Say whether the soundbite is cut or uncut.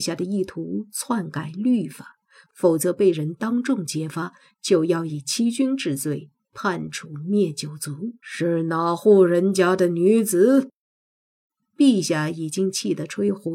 cut